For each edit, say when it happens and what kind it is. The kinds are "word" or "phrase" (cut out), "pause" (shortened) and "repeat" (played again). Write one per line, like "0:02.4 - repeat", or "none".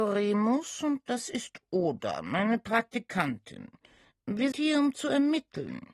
0:04.5 - word